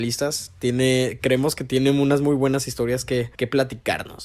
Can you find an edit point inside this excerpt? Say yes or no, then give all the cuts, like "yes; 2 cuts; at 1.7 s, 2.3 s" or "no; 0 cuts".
yes; 1 cut; at 3.3 s